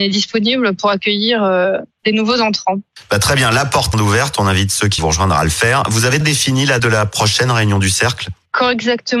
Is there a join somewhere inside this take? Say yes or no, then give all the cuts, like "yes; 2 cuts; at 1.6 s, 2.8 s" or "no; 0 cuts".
yes; 4 cuts; at 3.9 s, 5.0 s, 6.2 s, 6.8 s